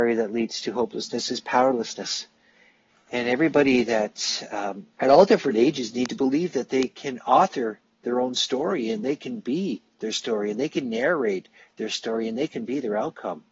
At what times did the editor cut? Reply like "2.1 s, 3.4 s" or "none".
4.9 s